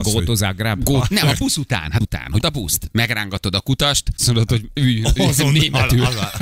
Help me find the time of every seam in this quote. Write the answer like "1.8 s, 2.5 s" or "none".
2.0 s, 2.4 s, 4.2 s